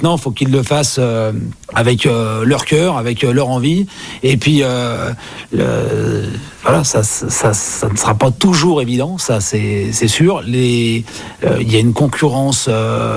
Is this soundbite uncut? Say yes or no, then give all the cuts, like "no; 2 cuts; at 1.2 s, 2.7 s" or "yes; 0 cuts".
yes; 0 cuts